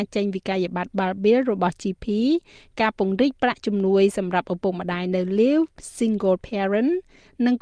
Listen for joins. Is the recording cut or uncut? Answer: uncut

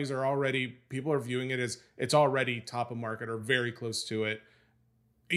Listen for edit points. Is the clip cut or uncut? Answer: uncut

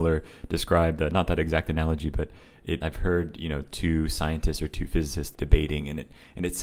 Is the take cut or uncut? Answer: cut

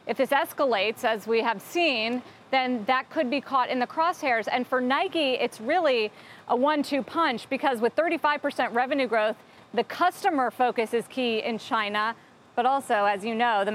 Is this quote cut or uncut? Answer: uncut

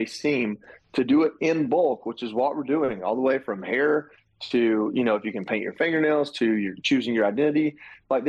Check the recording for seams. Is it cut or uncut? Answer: uncut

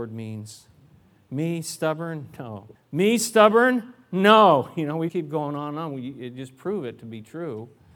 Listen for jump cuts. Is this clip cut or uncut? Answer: cut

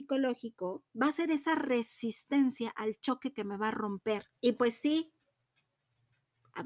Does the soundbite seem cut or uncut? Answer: cut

